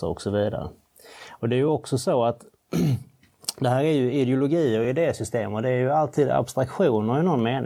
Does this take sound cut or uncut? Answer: uncut